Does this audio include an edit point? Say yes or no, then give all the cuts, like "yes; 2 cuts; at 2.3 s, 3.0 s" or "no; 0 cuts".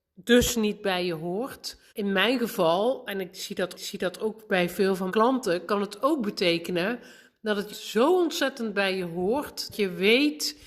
yes; 5 cuts; at 1.9 s, 3.7 s, 5.1 s, 7.7 s, 9.7 s